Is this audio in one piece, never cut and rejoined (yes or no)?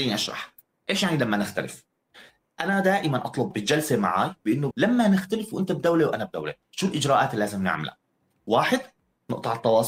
no